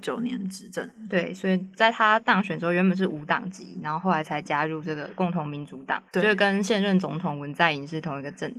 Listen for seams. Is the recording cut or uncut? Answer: cut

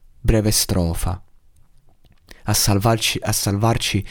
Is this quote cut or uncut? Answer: uncut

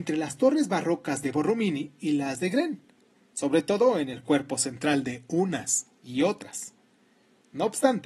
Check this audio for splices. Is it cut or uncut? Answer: uncut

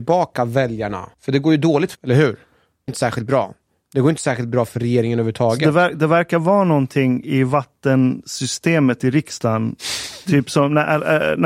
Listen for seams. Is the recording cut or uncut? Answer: cut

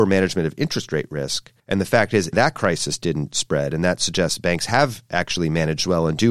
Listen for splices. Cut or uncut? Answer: cut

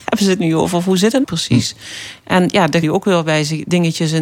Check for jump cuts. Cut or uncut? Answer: cut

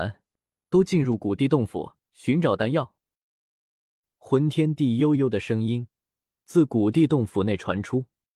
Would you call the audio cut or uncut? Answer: cut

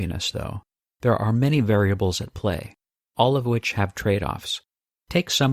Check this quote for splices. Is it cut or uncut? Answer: uncut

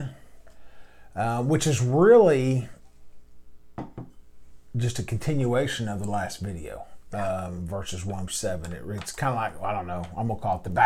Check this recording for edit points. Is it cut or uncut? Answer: cut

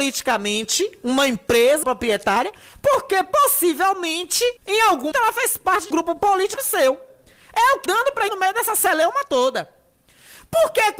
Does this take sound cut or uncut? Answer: cut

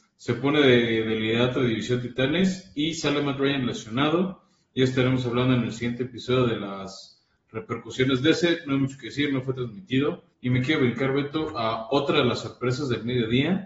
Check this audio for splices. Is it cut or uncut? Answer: cut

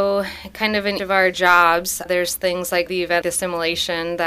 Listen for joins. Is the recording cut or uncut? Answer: cut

